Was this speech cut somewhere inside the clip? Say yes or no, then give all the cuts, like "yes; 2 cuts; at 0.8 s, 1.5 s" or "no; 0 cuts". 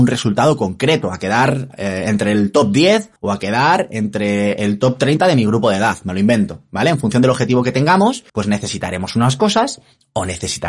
yes; 2 cuts; at 3.2 s, 8.3 s